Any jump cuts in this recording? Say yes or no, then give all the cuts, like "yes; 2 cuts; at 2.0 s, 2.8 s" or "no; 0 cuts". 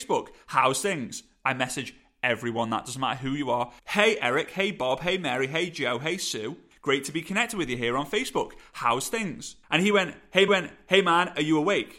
yes; 4 cuts; at 3.8 s, 6.7 s, 9.6 s, 10.5 s